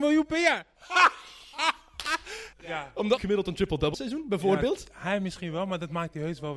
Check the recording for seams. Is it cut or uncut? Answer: cut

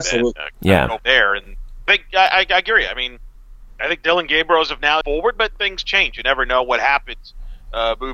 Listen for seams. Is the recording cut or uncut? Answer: cut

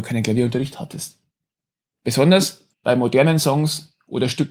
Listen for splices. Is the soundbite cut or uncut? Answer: cut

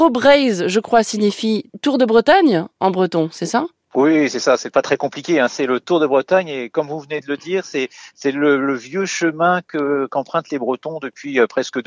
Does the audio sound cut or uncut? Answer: uncut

